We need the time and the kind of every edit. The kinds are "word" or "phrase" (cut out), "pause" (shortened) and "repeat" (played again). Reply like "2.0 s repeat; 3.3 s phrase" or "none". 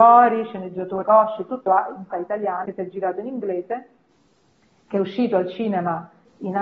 1.0 s word; 1.7 s word; 2.1 s word; 2.7 s word

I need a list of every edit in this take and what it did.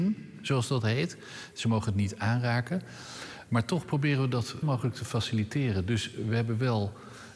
4.6 s word

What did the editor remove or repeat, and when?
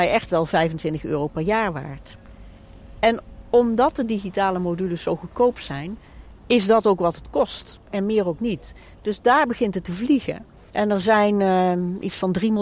6.4 s pause

